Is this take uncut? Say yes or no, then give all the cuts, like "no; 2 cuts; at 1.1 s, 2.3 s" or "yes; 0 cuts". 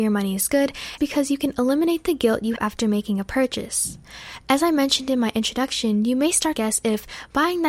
no; 3 cuts; at 1.0 s, 2.6 s, 6.6 s